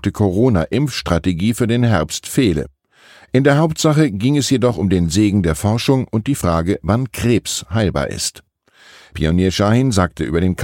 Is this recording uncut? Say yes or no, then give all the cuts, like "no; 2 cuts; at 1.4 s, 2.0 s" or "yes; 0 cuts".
yes; 0 cuts